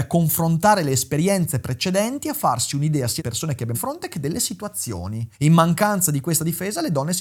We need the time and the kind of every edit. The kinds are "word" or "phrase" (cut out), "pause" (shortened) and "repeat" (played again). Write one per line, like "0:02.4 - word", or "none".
0:03.2 - word
0:03.7 - word
0:05.3 - pause